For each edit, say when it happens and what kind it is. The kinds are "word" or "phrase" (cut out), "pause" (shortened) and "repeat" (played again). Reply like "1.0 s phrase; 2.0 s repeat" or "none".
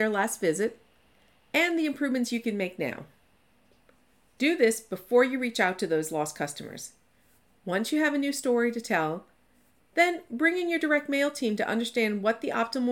none

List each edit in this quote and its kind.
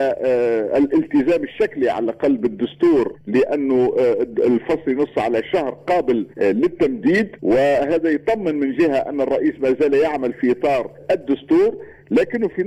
none

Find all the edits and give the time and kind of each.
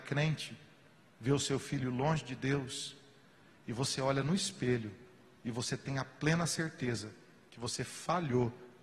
none

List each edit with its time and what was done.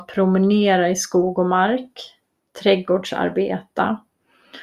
none

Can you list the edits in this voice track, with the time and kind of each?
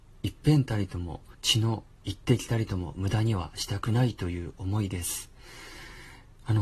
1.3 s pause

